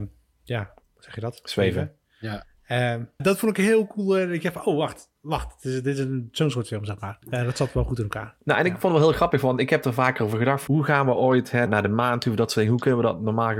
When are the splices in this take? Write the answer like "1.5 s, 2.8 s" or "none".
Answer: 3.2 s, 5.2 s, 7.2 s, 10.7 s, 11.7 s